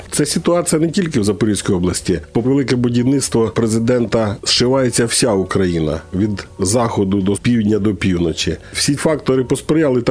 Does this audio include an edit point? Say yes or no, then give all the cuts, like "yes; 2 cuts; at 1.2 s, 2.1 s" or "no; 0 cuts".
yes; 3 cuts; at 2.4 s, 7.4 s, 9.0 s